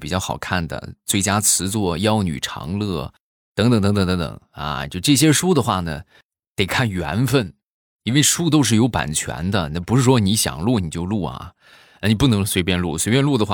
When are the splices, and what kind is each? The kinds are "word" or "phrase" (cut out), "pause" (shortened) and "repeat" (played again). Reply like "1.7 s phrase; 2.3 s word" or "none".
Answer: none